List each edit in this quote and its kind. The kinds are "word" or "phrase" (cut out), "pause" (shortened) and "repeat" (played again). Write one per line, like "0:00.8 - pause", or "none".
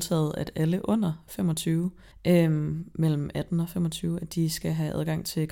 0:02.1 - pause